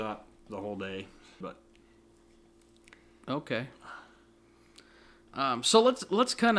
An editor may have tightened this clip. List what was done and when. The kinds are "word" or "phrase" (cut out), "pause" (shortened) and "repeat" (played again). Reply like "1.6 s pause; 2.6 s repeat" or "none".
1.4 s word; 5.3 s word

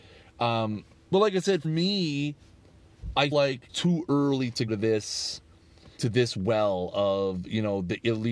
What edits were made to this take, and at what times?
1.1 s word; 1.6 s word; 3.3 s word; 3.7 s word; 4.7 s word; 6.0 s word

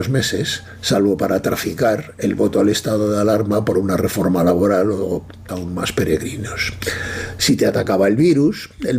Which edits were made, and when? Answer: 5.5 s word

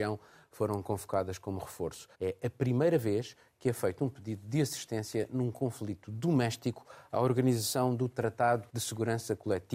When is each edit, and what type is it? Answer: 2.1 s pause; 8.7 s pause

